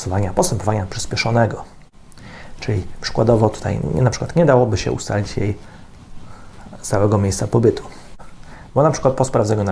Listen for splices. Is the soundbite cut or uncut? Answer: uncut